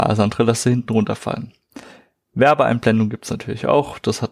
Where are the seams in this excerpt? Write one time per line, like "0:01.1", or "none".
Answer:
none

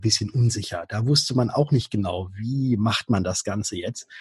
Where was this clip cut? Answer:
none

